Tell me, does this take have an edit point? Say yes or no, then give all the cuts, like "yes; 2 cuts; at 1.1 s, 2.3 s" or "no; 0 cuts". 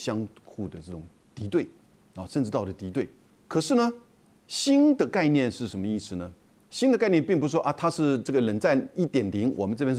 no; 0 cuts